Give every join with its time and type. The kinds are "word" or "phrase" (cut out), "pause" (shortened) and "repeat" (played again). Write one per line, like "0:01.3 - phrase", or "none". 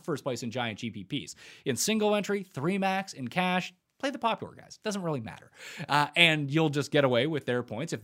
none

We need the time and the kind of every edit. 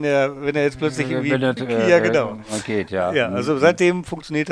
0:01.6 - phrase

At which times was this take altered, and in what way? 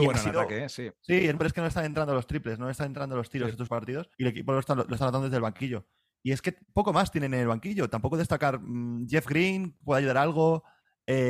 0:01.4 - word
0:03.7 - word
0:04.1 - pause

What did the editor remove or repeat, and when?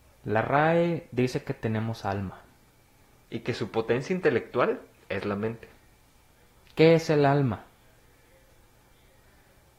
none

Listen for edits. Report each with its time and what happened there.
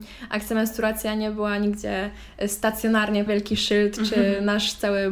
0:03.3 - word

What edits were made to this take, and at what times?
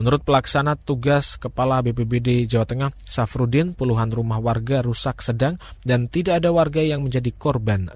none

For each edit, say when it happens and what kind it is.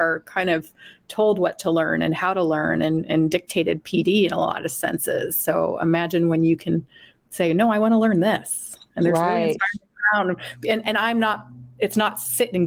none

